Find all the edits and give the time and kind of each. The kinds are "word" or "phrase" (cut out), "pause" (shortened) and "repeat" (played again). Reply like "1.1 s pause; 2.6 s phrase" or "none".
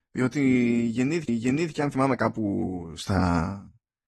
1.3 s repeat; 2.2 s word